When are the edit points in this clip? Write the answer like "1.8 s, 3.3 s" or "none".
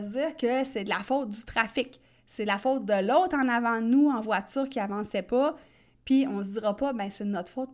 none

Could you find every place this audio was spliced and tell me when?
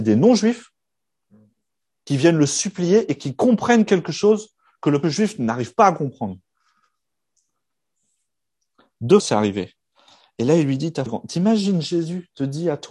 5.0 s, 9.2 s, 11.1 s

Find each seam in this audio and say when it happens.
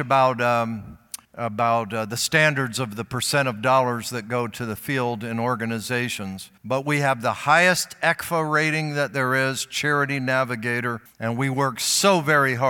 1.2 s, 6.6 s, 11.1 s

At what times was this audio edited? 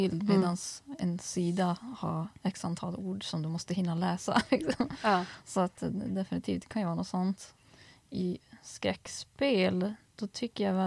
none

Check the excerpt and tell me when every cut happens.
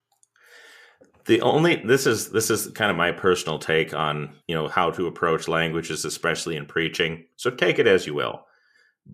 4.4 s

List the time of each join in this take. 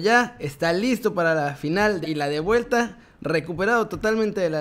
2.0 s

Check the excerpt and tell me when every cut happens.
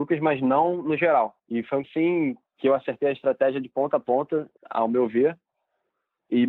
1.4 s, 1.8 s, 2.5 s, 4.6 s

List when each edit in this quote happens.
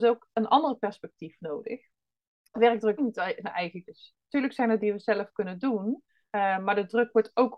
2.5 s, 3.0 s, 3.9 s, 4.8 s, 6.2 s

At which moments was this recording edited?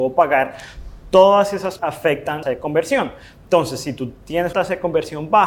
1.8 s, 2.4 s, 4.5 s

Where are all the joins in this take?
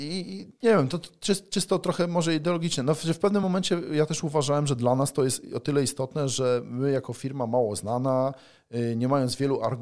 none

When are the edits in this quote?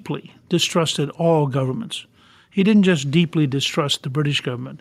none

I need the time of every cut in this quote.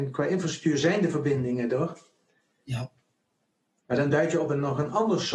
none

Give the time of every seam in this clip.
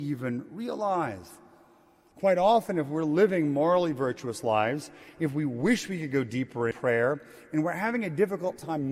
6.7 s

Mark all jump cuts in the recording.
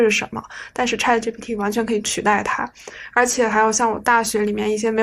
none

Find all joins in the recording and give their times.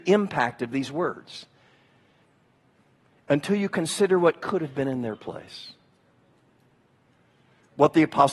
none

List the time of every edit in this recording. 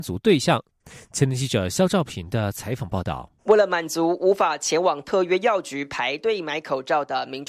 3.4 s

